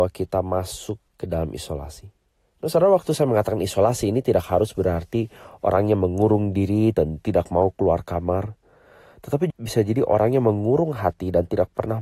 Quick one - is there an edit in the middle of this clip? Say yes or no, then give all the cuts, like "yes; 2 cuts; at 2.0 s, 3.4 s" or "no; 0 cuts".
yes; 3 cuts; at 1.1 s, 2.3 s, 9.5 s